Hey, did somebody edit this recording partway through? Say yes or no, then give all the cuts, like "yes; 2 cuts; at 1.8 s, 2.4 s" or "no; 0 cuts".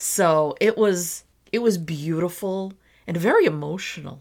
yes; 1 cut; at 1.3 s